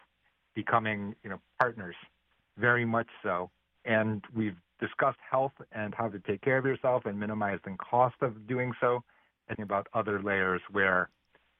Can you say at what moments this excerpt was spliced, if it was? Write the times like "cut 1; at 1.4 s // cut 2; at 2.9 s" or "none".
cut 1; at 9.5 s